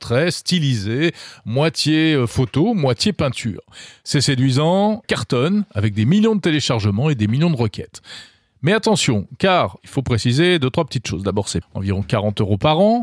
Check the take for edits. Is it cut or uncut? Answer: cut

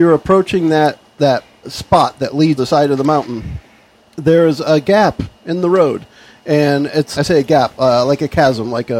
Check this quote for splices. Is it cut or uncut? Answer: cut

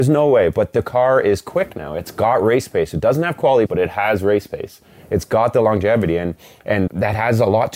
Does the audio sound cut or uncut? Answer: cut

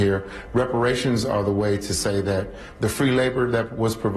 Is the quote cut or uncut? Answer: uncut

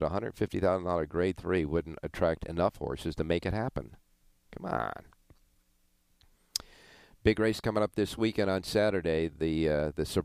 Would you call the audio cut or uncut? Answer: uncut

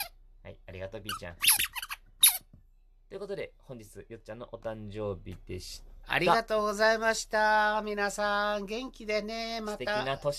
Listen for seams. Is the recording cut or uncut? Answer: uncut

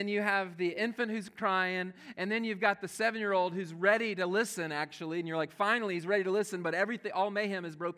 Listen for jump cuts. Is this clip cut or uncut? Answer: uncut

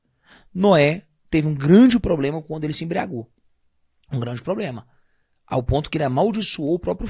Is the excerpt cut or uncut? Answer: uncut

